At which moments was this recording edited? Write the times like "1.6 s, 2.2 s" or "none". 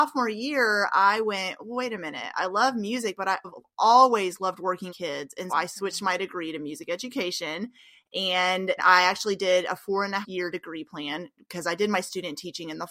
3.4 s, 4.9 s, 5.5 s, 8.8 s, 10.2 s